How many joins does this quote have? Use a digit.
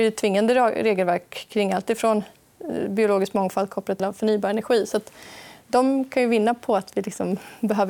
1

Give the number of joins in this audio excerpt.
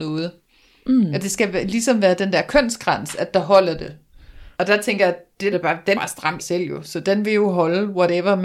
4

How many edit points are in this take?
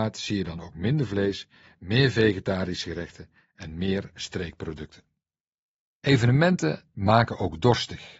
0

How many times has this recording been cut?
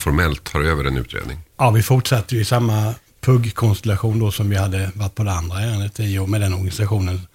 1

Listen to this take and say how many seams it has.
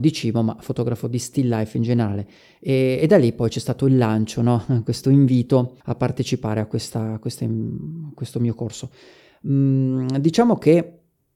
1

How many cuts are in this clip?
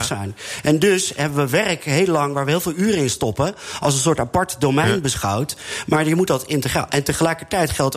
0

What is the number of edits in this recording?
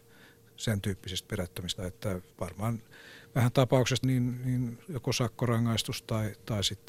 4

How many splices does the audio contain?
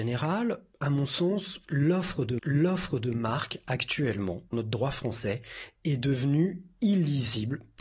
2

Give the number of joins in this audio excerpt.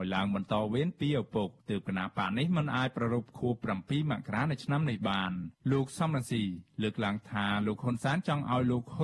2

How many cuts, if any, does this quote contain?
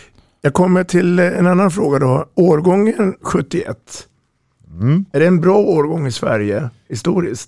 0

